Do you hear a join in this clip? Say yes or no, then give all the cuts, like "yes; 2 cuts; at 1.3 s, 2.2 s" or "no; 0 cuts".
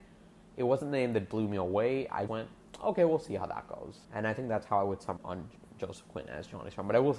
yes; 3 cuts; at 2.3 s, 4.0 s, 5.2 s